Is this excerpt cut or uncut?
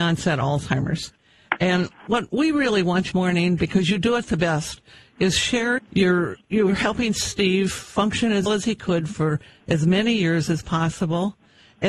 cut